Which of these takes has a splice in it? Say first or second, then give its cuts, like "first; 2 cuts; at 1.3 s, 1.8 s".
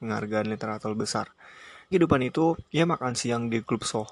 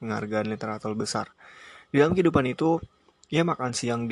first; 2 cuts; at 1.9 s, 2.7 s